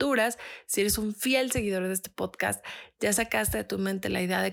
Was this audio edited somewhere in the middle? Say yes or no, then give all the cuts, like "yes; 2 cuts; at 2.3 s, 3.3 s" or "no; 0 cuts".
no; 0 cuts